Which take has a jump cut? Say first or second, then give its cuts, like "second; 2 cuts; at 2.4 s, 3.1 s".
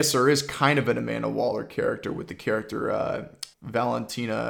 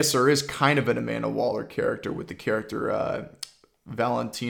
first; 1 cut; at 3.5 s